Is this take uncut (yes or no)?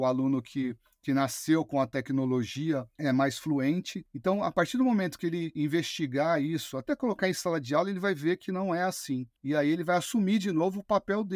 yes